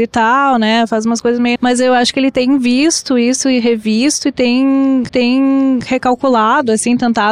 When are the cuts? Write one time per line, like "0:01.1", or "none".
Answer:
0:01.6
0:05.1